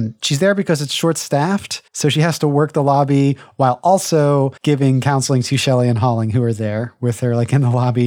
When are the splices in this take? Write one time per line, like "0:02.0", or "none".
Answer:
0:01.9
0:04.6